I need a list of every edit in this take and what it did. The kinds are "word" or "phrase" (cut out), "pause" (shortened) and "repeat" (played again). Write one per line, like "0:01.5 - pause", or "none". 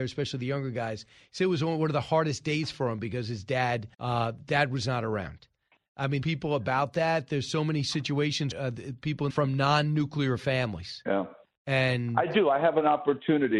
0:03.9 - pause
0:06.2 - phrase
0:08.5 - phrase
0:09.3 - phrase